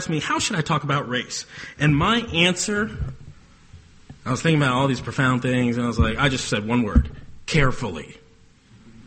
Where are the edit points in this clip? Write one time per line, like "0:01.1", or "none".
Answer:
0:04.2